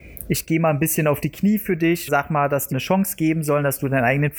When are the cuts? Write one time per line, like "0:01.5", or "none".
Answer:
0:02.1
0:02.7